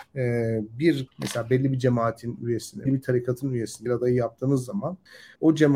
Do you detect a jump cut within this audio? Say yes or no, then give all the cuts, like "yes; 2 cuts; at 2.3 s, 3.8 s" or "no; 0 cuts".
yes; 3 cuts; at 1.1 s, 2.9 s, 3.9 s